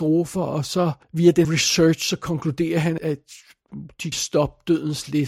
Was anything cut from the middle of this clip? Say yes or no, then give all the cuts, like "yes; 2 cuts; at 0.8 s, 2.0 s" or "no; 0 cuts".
yes; 4 cuts; at 1.0 s, 1.4 s, 3.0 s, 4.1 s